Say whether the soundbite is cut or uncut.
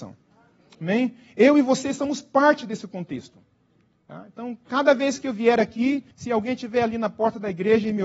cut